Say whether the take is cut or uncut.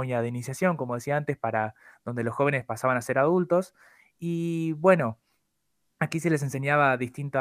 uncut